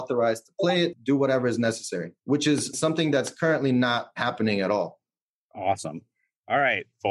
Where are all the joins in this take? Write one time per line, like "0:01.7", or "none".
0:00.9
0:02.2
0:02.7

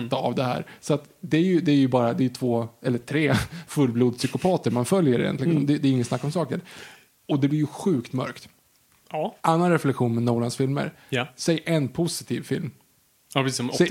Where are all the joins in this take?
0:09.4

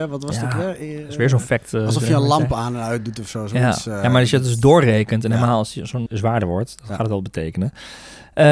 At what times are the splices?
0:06.1

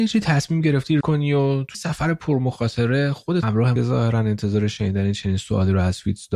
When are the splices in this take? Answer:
0:01.0
0:01.7
0:03.4
0:03.8

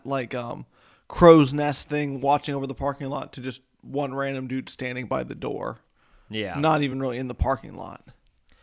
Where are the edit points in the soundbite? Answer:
none

